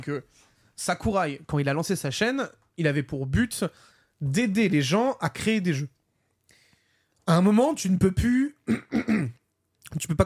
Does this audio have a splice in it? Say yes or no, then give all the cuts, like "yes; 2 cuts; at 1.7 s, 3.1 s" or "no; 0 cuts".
no; 0 cuts